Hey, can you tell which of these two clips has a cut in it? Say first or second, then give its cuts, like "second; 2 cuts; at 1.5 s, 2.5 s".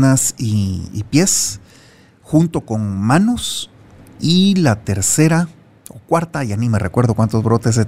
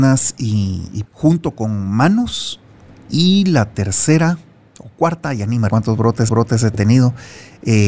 second; 3 cuts; at 1.0 s, 5.7 s, 6.3 s